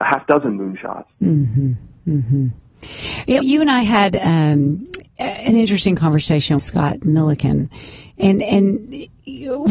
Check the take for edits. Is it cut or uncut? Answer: cut